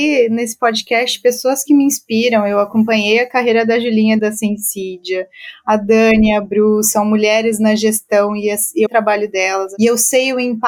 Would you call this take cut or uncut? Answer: cut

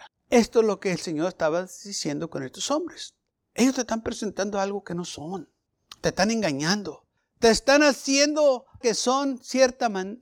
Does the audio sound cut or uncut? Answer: cut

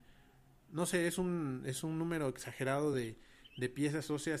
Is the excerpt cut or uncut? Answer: uncut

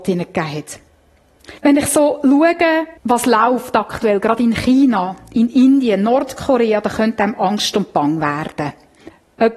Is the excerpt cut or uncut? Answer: cut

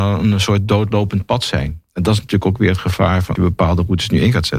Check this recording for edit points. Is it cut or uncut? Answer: cut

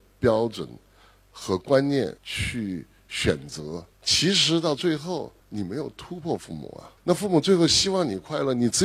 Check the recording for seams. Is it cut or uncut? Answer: cut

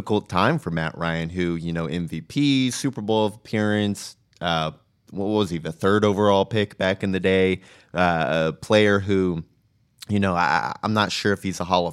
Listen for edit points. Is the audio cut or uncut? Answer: uncut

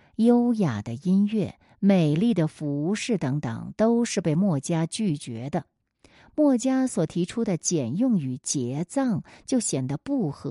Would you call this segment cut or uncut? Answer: uncut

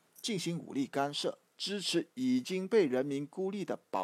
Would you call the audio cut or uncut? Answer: cut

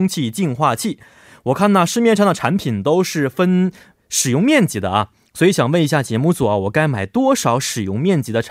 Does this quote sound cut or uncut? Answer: uncut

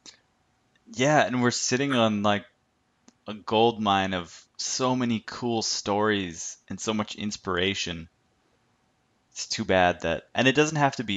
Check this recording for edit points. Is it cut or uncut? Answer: uncut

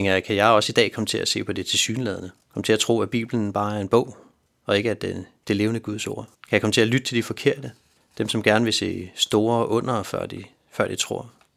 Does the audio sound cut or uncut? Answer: cut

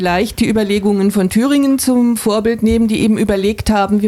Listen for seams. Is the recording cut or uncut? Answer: uncut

